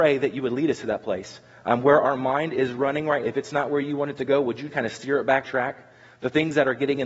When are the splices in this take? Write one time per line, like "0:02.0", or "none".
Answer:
0:03.2
0:04.7
0:05.4

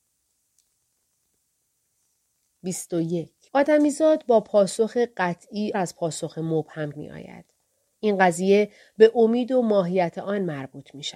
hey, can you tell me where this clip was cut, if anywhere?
0:03.5
0:05.7
0:06.9

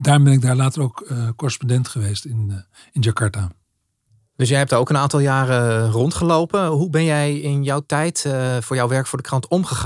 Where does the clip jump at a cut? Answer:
none

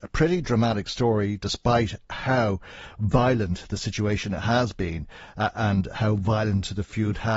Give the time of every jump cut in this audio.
none

